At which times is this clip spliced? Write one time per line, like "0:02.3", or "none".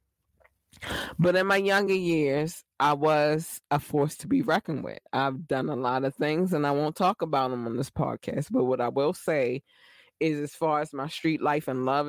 none